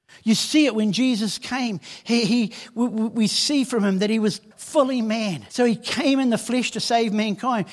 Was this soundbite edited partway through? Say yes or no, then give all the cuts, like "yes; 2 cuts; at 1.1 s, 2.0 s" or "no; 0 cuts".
yes; 2 cuts; at 4.5 s, 5.5 s